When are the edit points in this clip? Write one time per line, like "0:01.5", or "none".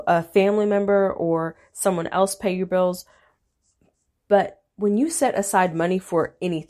none